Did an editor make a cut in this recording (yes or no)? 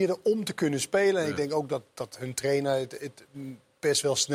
no